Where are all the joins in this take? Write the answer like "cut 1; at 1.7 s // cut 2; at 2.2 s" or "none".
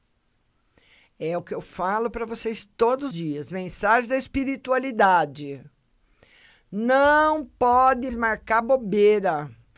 cut 1; at 3.1 s // cut 2; at 8.1 s